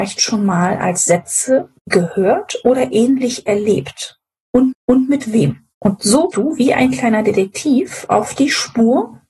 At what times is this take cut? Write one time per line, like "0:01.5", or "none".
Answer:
0:01.8
0:04.7
0:05.7
0:06.3